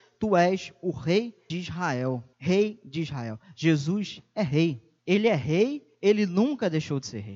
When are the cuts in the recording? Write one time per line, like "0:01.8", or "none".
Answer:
0:01.5
0:02.3
0:05.0
0:05.9